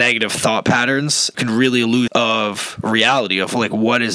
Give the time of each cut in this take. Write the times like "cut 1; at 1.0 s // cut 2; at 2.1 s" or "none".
cut 1; at 1.3 s // cut 2; at 2.1 s